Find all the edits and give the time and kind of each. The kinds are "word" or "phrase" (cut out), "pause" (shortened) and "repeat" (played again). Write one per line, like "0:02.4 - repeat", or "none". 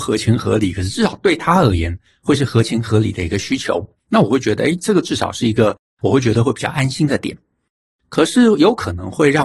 0:04.0 - pause